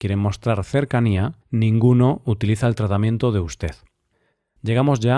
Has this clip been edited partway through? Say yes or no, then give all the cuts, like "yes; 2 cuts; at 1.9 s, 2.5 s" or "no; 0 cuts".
yes; 1 cut; at 1.4 s